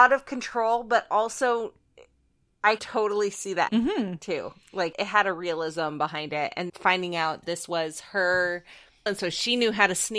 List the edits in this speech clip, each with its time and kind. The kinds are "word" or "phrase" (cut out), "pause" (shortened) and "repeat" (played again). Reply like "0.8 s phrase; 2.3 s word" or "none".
2.8 s word; 3.7 s word; 4.9 s word; 6.7 s word; 7.4 s word; 9.1 s word